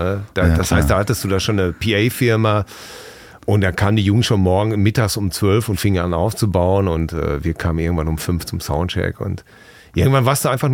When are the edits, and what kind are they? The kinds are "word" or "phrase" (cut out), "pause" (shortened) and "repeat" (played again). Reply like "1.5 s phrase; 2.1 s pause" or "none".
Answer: none